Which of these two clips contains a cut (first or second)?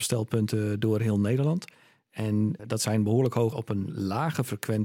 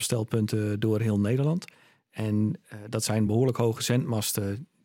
first